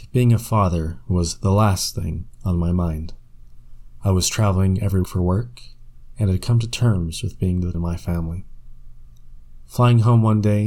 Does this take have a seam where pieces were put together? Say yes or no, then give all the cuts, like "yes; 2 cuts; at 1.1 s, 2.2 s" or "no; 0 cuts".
yes; 2 cuts; at 5.0 s, 7.7 s